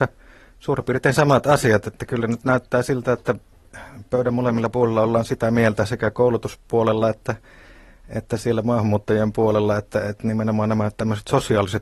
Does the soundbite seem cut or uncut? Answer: uncut